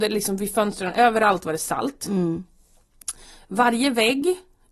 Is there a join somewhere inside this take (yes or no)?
no